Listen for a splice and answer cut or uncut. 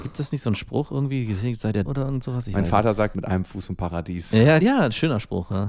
cut